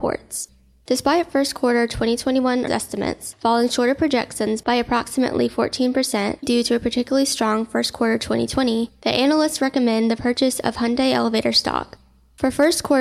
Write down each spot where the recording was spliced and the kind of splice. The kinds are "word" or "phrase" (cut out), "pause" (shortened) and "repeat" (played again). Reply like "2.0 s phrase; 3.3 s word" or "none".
2.7 s word; 6.4 s word